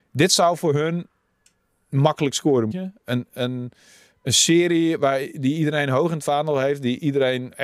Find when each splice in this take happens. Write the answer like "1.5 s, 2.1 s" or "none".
2.7 s